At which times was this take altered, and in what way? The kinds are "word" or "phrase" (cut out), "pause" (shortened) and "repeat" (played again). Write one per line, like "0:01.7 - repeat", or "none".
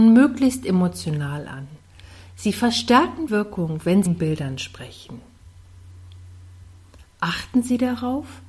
0:03.3 - word
0:04.1 - word